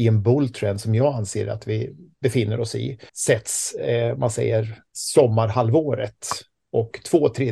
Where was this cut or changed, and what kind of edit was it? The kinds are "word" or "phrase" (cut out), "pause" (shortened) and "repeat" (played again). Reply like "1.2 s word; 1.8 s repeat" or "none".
3.1 s pause; 4.9 s pause